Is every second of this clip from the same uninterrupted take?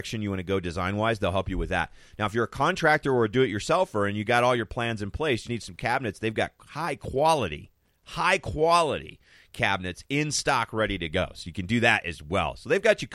no; 1 cut; at 5.4 s

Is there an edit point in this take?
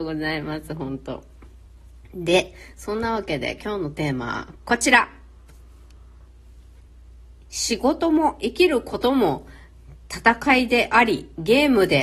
yes; 1 cut; at 4.6 s

